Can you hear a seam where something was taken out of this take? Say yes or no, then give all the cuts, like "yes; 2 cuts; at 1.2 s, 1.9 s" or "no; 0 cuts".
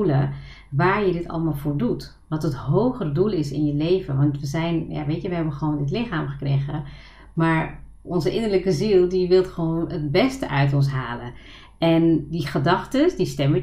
no; 0 cuts